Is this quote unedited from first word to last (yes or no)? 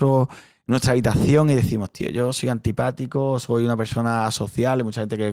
yes